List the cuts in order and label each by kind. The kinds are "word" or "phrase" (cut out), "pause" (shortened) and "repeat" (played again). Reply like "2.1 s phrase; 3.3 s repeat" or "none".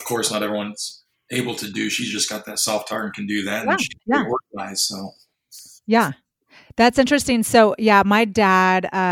none